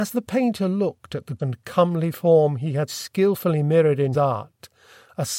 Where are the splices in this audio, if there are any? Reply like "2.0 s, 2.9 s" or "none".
1.4 s, 2.9 s, 4.1 s